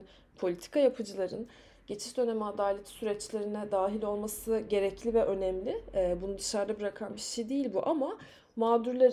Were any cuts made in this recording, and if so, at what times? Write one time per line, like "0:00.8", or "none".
none